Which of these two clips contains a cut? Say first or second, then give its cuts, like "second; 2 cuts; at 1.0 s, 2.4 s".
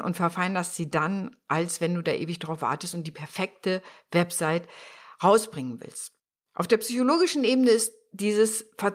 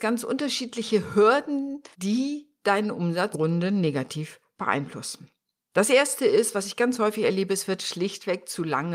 second; 2 cuts; at 1.9 s, 3.3 s